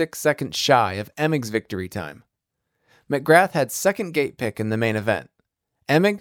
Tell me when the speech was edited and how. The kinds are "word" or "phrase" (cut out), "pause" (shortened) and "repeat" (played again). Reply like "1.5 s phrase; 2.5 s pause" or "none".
none